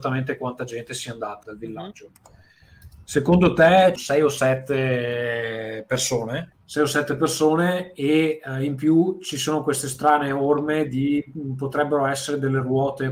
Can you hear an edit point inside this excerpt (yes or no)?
yes